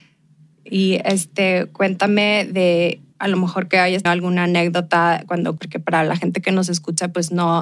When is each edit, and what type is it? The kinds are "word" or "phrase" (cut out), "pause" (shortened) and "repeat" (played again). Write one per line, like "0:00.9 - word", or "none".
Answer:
0:03.1 - pause
0:04.1 - word
0:05.6 - word